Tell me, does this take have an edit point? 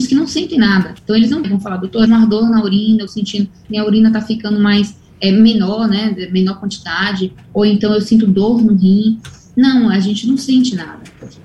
yes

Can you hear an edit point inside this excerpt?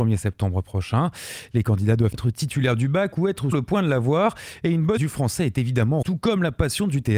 yes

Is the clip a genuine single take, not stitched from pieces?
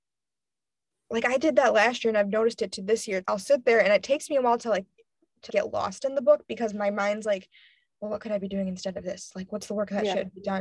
no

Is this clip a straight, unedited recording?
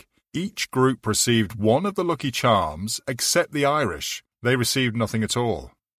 no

